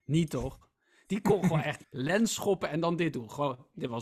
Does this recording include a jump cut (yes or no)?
yes